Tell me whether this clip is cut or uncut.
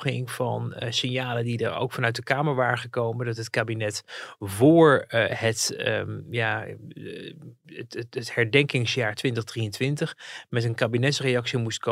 uncut